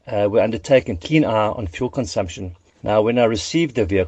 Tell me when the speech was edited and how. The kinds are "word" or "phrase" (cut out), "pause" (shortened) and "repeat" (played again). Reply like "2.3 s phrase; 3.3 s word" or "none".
1.0 s phrase